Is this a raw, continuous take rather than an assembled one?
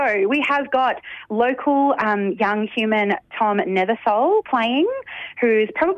yes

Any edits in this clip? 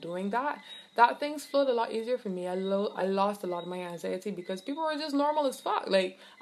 no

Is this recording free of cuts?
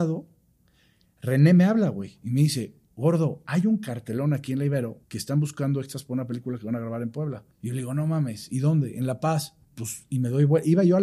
no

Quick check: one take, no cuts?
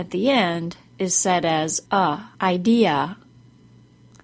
no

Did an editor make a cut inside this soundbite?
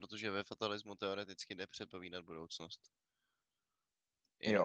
no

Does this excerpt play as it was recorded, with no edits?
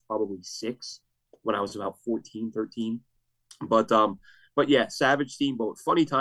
yes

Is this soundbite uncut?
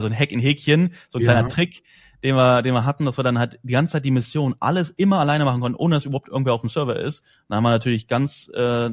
yes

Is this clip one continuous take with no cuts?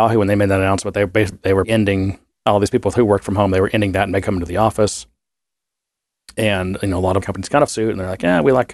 no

